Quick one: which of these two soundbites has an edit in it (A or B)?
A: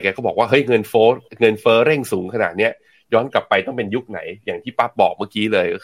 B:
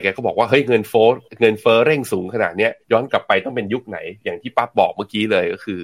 B